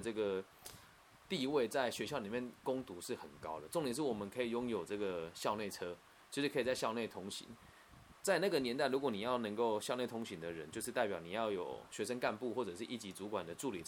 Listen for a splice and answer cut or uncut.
uncut